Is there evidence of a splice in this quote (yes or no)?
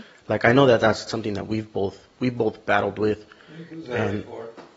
yes